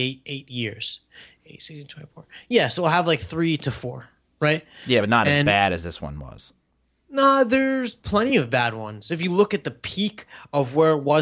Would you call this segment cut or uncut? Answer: uncut